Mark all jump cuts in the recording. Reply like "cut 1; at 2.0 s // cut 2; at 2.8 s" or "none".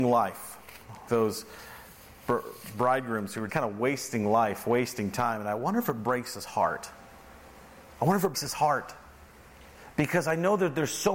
cut 1; at 1.1 s // cut 2; at 3.5 s // cut 3; at 8.3 s

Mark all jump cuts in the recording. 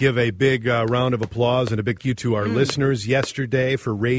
cut 1; at 2.0 s

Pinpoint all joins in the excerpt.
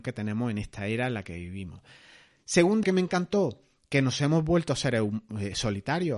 cut 1; at 2.8 s

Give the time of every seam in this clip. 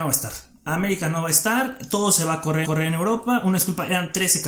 cut 1; at 2.6 s

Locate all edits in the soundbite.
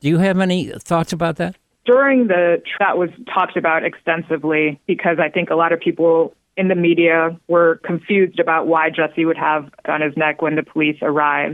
cut 1; at 2.8 s // cut 2; at 9.9 s

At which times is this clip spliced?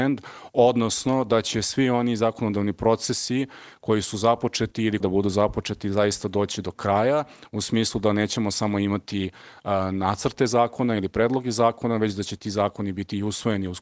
cut 1; at 5.0 s

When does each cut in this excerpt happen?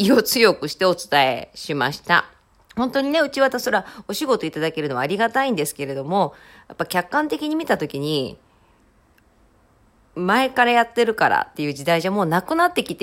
cut 1; at 2.5 s

